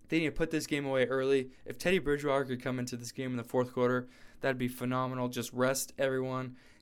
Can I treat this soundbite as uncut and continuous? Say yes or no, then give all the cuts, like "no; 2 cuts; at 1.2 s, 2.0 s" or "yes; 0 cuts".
no; 1 cut; at 1.5 s